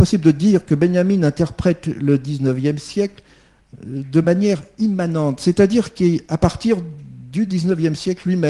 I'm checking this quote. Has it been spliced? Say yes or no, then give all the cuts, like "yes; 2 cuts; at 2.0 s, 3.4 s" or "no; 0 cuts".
no; 0 cuts